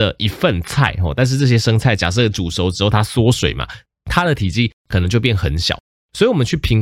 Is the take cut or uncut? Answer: uncut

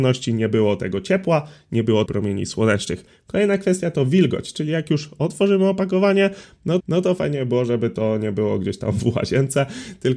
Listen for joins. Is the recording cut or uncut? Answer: cut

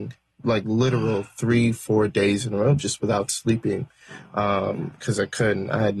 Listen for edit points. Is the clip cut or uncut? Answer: uncut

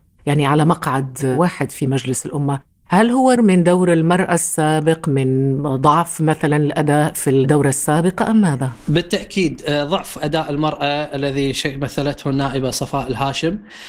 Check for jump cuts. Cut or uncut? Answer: cut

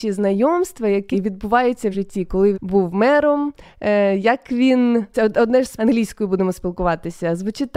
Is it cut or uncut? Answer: cut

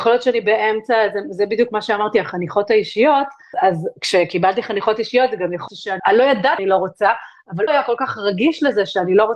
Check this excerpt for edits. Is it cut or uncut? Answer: cut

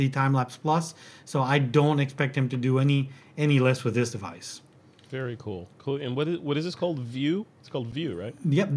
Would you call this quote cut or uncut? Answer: uncut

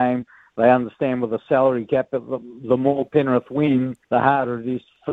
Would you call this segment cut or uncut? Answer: cut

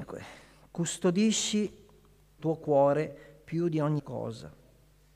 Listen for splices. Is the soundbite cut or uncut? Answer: cut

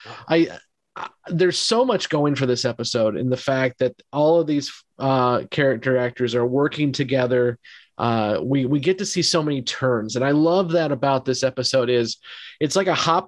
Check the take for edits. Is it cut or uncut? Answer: uncut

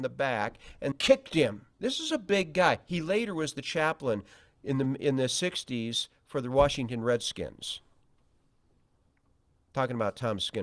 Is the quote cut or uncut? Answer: cut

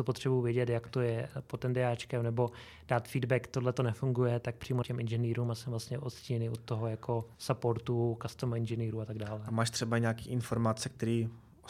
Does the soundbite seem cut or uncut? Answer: cut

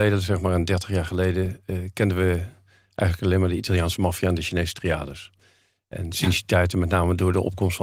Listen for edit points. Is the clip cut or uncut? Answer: uncut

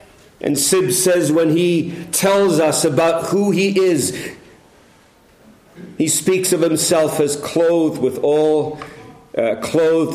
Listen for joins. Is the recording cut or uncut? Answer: uncut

